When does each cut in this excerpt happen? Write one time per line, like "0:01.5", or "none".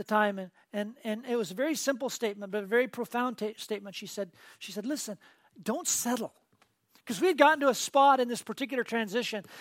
none